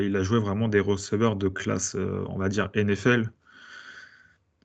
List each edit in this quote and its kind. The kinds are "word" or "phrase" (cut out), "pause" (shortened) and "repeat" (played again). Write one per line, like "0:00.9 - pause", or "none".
none